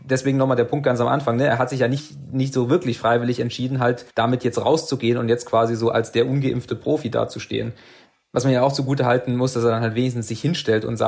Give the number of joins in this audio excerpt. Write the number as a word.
one